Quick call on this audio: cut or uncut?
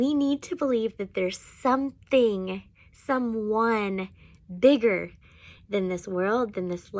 uncut